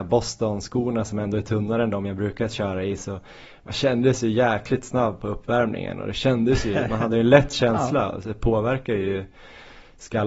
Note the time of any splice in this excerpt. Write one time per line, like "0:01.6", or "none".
none